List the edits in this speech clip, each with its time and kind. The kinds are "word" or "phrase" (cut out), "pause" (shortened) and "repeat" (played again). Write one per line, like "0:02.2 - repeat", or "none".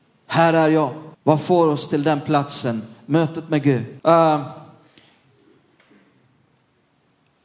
0:01.1 - pause
0:04.0 - pause